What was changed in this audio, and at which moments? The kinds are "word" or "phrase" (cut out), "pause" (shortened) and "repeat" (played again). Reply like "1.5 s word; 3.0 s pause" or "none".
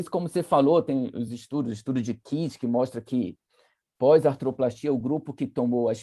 none